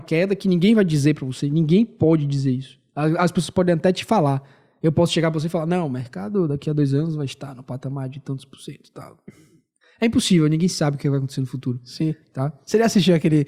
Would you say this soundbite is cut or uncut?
uncut